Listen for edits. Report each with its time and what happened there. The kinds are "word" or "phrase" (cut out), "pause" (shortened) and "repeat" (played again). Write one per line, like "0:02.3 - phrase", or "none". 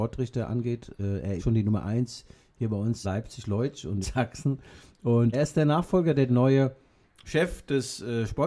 0:01.4 - word
0:03.0 - word
0:04.0 - word
0:05.3 - word
0:06.3 - word

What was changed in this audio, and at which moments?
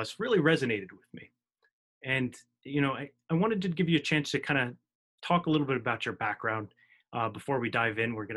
none

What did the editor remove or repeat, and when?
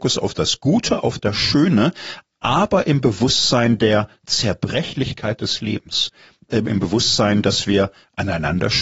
none

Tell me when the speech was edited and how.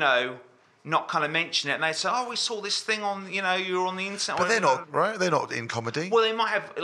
0:04.8 - word

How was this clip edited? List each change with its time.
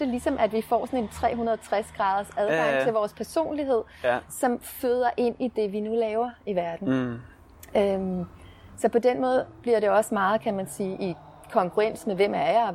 none

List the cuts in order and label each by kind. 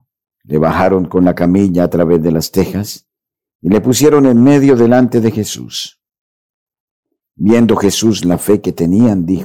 none

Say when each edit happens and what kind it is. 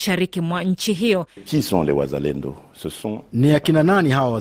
none

